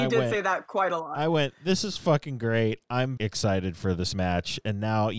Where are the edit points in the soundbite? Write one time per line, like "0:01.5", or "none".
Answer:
0:03.2